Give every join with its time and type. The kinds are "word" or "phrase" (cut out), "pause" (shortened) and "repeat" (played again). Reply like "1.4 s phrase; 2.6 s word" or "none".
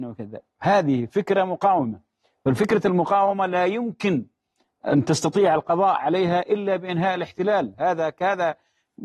none